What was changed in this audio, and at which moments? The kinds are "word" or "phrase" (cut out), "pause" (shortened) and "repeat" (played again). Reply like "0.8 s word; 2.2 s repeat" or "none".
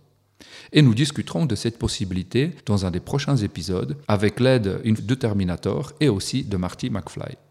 2.6 s pause; 4.0 s pause; 5.0 s phrase